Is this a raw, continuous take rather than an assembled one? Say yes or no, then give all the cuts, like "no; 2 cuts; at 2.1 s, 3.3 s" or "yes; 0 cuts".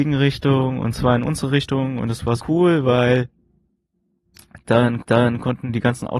no; 2 cuts; at 2.4 s, 5.0 s